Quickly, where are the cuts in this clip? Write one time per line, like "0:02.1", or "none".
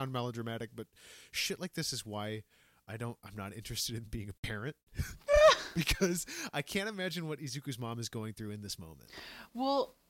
none